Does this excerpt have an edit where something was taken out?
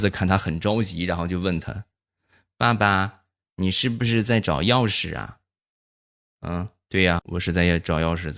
yes; 1 cut; at 7.2 s

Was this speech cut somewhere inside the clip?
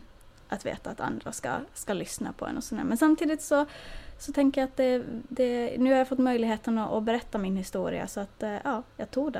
no; 0 cuts

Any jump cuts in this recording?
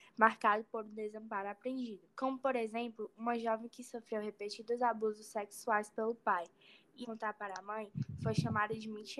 yes; 2 cuts; at 2.1 s, 7.0 s

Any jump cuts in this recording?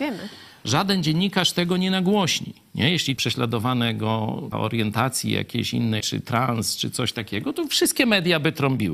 yes; 3 cuts; at 3.2 s, 4.5 s, 6.0 s

